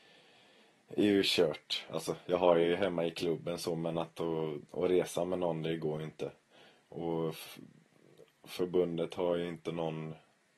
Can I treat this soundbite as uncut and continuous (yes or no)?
yes